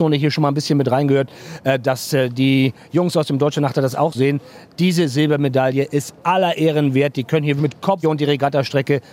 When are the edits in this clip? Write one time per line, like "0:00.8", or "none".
0:04.1
0:07.6
0:08.0